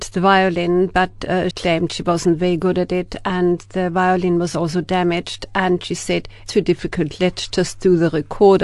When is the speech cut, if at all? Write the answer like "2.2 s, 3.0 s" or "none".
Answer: 1.5 s, 6.5 s